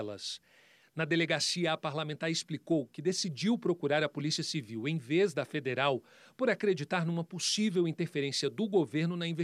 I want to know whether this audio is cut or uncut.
uncut